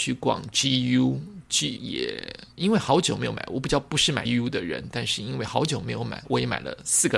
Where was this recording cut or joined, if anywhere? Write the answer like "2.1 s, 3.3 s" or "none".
1.8 s, 4.3 s